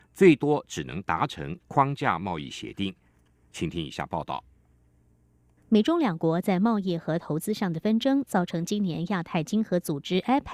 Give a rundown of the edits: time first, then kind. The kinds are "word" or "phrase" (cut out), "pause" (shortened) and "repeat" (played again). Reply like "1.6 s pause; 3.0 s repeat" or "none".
none